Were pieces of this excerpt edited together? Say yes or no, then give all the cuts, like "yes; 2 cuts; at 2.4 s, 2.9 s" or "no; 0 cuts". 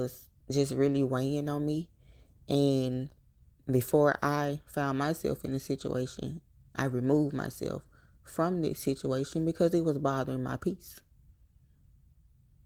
no; 0 cuts